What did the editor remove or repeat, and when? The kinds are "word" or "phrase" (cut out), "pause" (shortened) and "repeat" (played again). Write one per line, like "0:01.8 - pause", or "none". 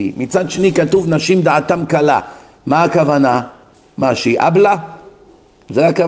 none